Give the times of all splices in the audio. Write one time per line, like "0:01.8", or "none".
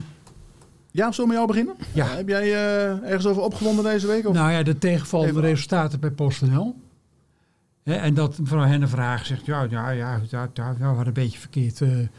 none